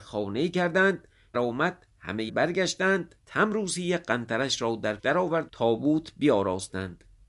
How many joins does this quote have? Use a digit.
5